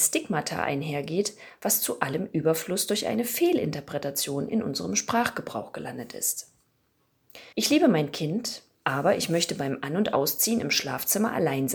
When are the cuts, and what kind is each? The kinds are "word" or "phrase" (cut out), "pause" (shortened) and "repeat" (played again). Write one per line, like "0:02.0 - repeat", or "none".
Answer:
0:07.5 - pause